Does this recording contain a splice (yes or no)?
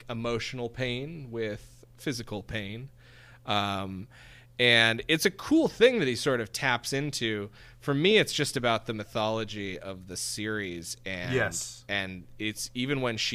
no